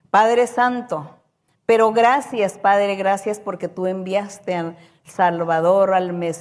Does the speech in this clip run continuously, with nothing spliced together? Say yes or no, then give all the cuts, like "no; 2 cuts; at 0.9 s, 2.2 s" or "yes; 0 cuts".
yes; 0 cuts